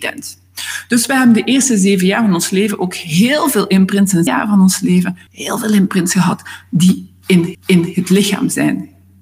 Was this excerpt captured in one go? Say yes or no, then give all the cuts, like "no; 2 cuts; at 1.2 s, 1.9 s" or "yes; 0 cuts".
no; 3 cuts; at 4.3 s, 5.3 s, 7.5 s